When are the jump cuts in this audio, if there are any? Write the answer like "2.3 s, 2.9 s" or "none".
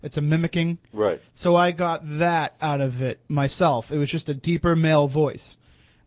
none